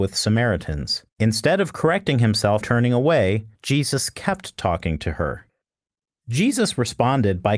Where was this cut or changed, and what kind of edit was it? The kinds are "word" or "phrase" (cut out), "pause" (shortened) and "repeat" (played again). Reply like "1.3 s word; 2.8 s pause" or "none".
1.1 s pause; 2.6 s word; 3.5 s pause